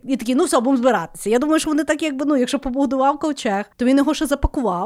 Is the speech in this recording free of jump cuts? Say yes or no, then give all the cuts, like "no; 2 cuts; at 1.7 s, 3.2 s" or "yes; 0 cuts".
no; 1 cut; at 3.7 s